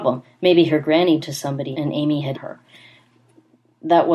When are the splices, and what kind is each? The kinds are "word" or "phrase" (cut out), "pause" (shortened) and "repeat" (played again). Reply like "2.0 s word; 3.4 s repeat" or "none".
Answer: 1.2 s word; 1.7 s word; 2.3 s word